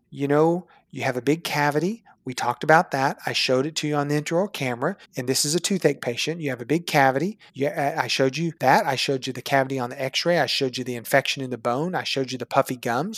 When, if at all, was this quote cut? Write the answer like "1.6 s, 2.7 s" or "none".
5.0 s, 7.5 s, 8.6 s